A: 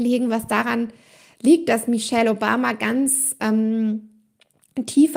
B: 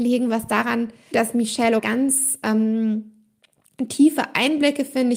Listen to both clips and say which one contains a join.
B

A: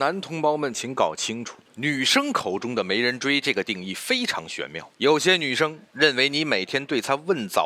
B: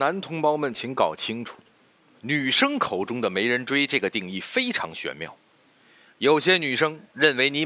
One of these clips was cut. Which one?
A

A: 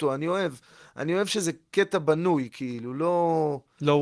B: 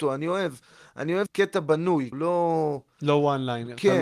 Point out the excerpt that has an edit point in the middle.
B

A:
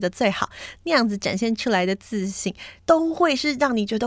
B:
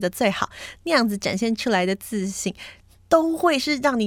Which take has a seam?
A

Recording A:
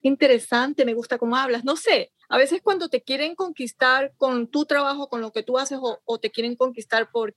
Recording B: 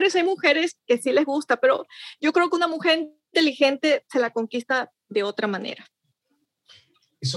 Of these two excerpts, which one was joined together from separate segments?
A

